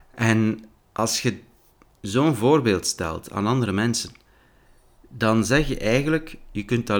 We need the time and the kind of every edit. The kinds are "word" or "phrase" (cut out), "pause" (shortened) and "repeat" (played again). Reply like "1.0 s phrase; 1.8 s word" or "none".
none